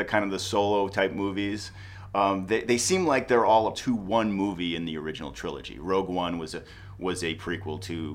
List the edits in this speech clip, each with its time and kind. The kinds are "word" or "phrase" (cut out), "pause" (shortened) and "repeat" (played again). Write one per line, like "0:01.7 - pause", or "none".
0:03.7 - word